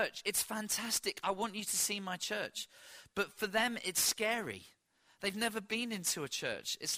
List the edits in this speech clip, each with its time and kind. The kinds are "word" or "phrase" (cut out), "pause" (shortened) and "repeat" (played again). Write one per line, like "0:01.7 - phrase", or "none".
none